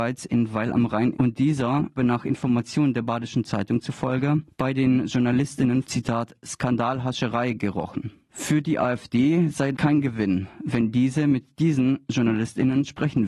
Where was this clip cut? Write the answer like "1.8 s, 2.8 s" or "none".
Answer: 1.1 s, 2.0 s, 5.8 s, 9.7 s